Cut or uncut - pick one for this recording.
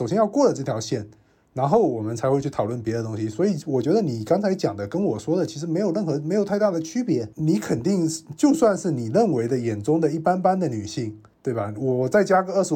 uncut